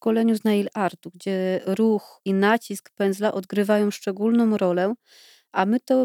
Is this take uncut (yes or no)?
no